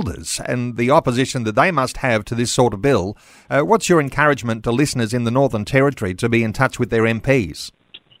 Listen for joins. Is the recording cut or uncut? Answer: uncut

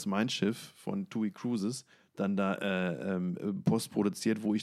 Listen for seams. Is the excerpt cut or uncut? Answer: cut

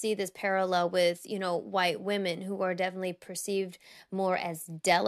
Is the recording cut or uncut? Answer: uncut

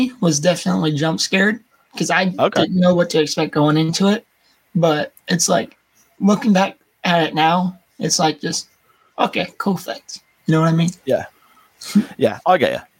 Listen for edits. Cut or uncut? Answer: uncut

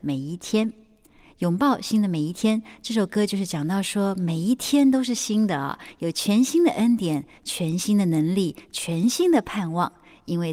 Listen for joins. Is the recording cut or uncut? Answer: uncut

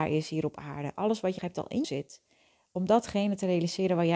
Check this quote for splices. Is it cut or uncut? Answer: cut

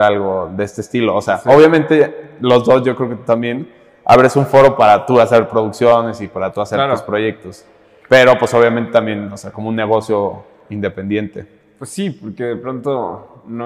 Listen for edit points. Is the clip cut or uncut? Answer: uncut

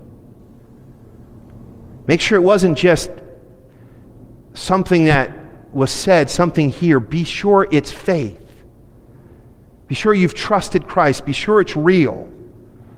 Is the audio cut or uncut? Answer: uncut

